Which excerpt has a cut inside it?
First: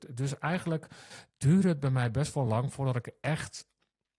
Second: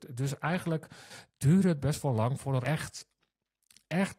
second; 2 cuts; at 1.8 s, 2.6 s

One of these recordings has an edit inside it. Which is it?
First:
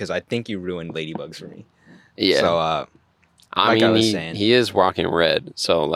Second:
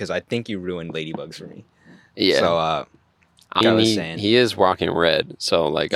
second; 1 cut; at 3.6 s

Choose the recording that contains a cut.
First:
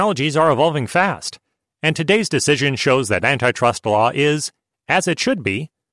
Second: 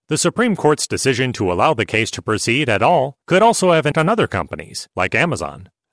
second; 3 cuts; at 3.2 s, 3.9 s, 4.9 s

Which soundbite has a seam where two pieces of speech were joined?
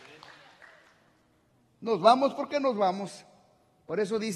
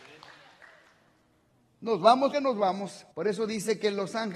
second; 2 cuts; at 2.3 s, 3.1 s

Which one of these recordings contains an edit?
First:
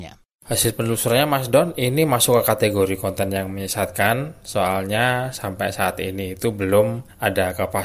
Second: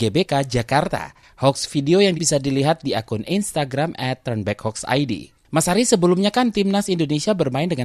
second; 1 cut; at 2.1 s

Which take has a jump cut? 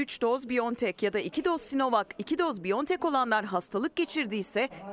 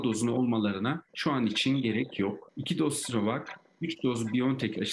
second; 1 cut; at 1.1 s

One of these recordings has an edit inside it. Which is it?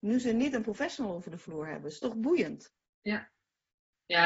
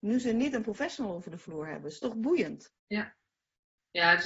second; 1 cut; at 2.8 s

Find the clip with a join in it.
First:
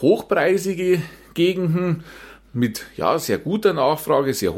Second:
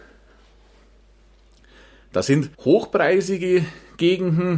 second; 1 cut; at 2.5 s

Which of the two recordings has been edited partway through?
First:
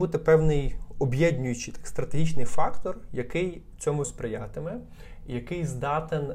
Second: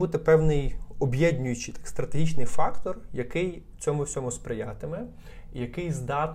first; 1 cut; at 4.0 s

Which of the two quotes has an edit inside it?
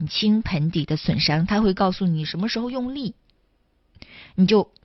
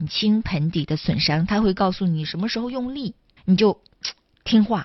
second; 1 cut; at 3.4 s

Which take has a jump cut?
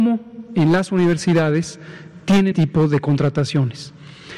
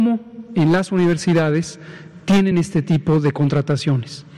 first; 1 cut; at 2.5 s

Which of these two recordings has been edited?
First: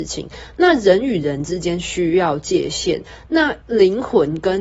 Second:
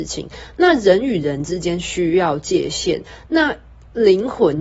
first; 1 cut; at 3.6 s

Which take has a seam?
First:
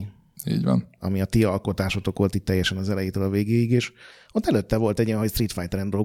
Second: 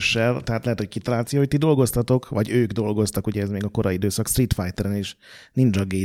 first; 1 cut; at 4.1 s

